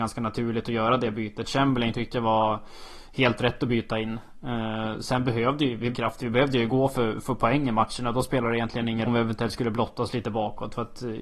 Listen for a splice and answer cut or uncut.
cut